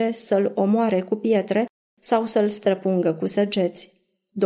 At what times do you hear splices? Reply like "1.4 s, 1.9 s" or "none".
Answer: none